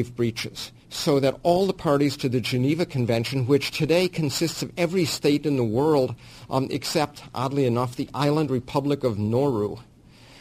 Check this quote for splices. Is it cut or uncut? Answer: uncut